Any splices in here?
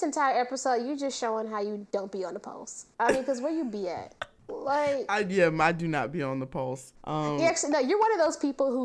yes; 2 cuts; at 4.4 s, 7.0 s

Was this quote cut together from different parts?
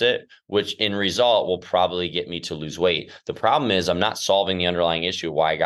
no; 0 cuts

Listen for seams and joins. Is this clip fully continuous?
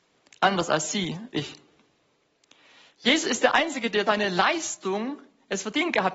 no; 2 cuts; at 1.3 s, 4.1 s

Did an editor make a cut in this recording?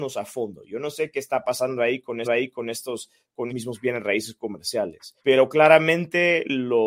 yes; 3 cuts; at 2.2 s, 3.5 s, 5.2 s

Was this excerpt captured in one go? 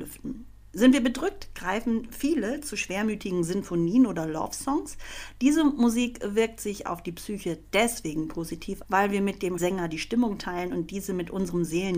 no; 2 cuts; at 8.8 s, 9.6 s

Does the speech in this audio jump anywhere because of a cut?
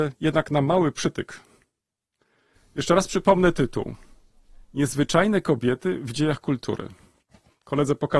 no; 0 cuts

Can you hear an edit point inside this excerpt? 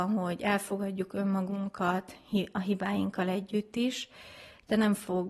no; 0 cuts

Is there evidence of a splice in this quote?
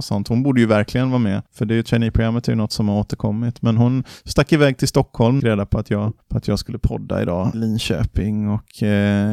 yes; 4 cuts; at 1.5 s, 5.4 s, 6.2 s, 7.5 s

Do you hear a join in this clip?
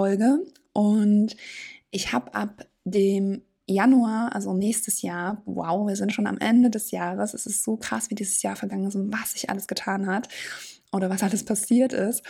no; 0 cuts

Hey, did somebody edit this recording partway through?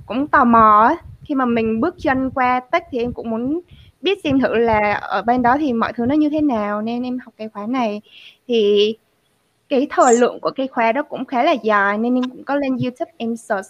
no; 0 cuts

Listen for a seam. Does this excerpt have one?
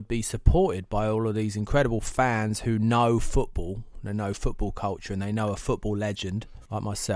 no; 0 cuts

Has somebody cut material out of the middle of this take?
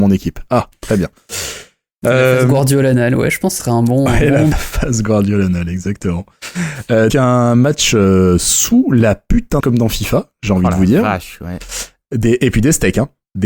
yes; 4 cuts; at 3.6 s, 4.5 s, 7.1 s, 9.6 s

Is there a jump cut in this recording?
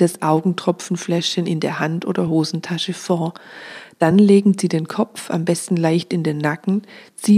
no; 0 cuts

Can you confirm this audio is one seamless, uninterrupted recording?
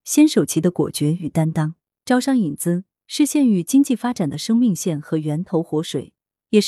yes; 0 cuts

